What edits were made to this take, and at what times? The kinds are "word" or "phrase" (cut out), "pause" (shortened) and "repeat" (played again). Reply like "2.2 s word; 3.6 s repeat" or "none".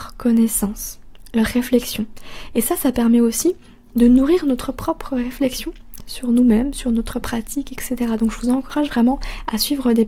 none